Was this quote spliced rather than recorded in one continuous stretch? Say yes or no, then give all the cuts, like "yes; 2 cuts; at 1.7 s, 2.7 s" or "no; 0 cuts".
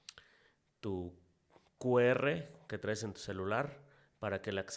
no; 0 cuts